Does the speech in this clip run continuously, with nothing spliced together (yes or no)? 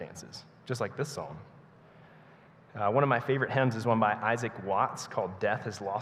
yes